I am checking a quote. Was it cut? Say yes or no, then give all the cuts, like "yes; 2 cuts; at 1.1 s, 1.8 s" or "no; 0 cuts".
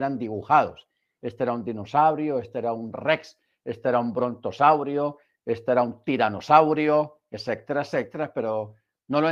no; 0 cuts